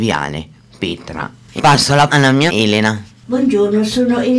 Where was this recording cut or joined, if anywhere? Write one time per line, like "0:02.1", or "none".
0:01.6
0:02.1
0:02.5